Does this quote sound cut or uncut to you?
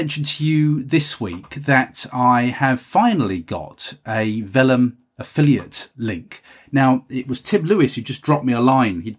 uncut